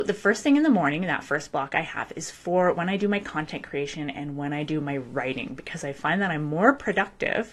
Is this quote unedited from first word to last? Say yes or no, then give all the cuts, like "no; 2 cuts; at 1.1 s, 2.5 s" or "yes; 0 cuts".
yes; 0 cuts